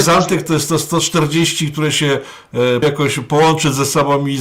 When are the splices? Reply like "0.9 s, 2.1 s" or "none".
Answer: 2.8 s